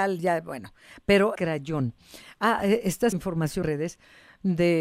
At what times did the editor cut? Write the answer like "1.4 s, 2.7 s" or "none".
1.3 s, 3.1 s, 3.6 s